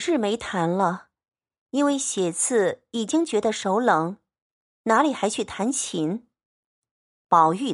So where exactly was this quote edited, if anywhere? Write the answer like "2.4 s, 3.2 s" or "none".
none